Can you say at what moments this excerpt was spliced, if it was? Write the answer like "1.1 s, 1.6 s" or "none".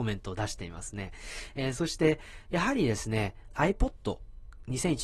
3.5 s